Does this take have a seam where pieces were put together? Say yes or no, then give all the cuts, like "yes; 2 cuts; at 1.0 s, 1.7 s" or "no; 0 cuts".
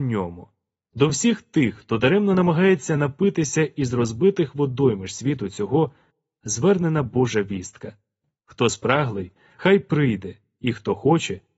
no; 0 cuts